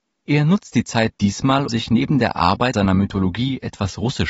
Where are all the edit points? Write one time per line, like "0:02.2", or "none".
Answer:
0:01.7
0:02.7